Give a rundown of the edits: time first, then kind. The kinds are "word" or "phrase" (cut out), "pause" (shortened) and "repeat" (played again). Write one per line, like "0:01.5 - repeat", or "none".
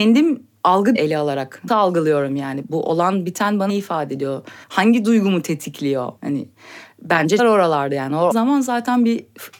0:00.9 - word
0:01.7 - word
0:02.6 - word
0:03.7 - word
0:04.6 - pause
0:06.2 - pause
0:07.4 - word
0:08.3 - phrase